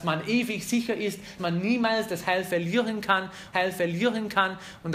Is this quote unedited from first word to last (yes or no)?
no